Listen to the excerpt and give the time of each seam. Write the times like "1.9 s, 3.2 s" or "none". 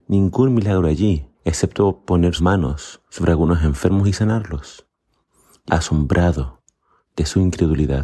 1.3 s, 2.4 s, 3.1 s, 5.7 s